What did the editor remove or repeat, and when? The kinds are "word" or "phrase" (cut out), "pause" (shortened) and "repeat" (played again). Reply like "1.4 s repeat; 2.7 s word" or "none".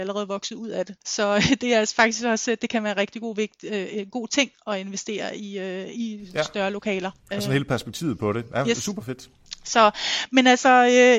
1.0 s pause; 7.2 s pause